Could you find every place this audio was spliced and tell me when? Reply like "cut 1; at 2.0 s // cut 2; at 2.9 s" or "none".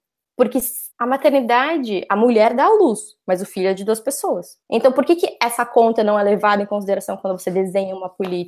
cut 1; at 0.9 s // cut 2; at 4.6 s

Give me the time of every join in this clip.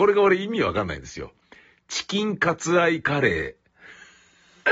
none

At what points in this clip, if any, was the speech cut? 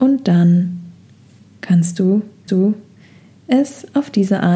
cut 1; at 2.5 s

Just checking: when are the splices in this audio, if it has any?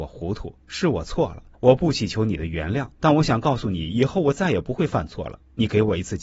cut 1; at 1.5 s // cut 2; at 2.9 s

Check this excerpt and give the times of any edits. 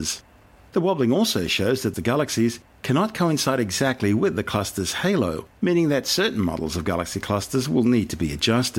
cut 1; at 1.9 s

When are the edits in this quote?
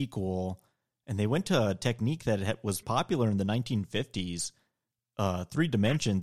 cut 1; at 2.8 s

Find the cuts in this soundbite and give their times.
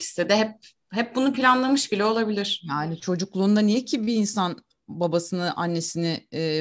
none

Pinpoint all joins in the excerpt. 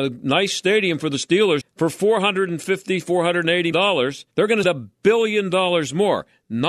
cut 1; at 1.6 s // cut 2; at 3.7 s // cut 3; at 4.3 s // cut 4; at 4.6 s

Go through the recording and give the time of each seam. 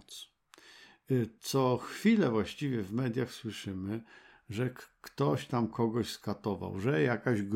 none

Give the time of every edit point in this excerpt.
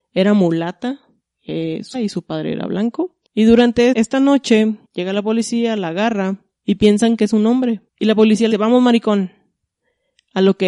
cut 1; at 1.2 s // cut 2; at 1.9 s // cut 3; at 3.2 s // cut 4; at 3.9 s // cut 5; at 4.8 s // cut 6; at 6.5 s // cut 7; at 7.9 s // cut 8; at 8.5 s

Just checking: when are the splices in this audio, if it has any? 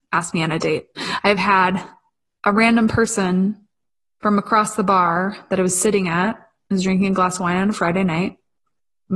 none

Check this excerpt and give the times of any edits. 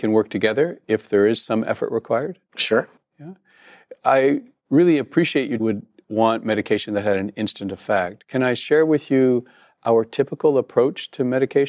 cut 1; at 2.5 s // cut 2; at 5.6 s

